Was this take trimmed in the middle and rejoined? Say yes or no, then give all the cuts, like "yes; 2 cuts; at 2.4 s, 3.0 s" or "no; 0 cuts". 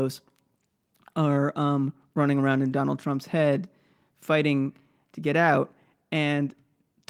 no; 0 cuts